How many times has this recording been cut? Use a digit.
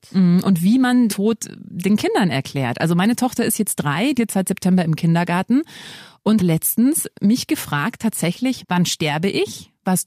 4